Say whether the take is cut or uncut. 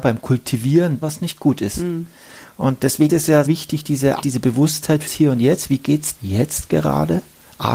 cut